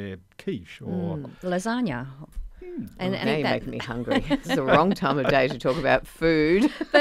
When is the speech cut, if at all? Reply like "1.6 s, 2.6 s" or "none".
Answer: 3.2 s, 4.4 s